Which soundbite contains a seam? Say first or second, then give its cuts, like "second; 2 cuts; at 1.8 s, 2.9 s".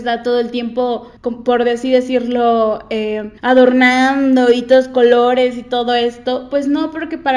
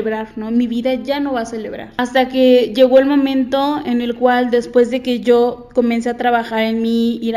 first; 2 cuts; at 1.2 s, 3.4 s